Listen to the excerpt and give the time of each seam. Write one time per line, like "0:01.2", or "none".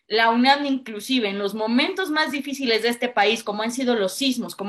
none